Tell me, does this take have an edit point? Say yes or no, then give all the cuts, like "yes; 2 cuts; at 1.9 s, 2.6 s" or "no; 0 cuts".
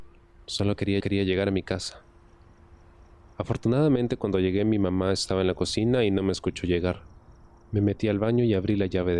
yes; 1 cut; at 1.0 s